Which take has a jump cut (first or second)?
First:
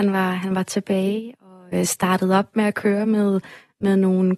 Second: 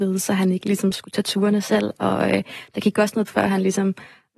second